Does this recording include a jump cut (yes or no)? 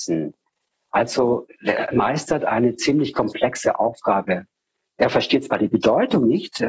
no